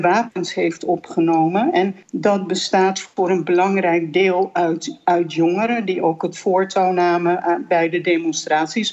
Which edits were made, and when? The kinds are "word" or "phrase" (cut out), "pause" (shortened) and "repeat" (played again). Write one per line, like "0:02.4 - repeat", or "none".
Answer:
0:02.0 - pause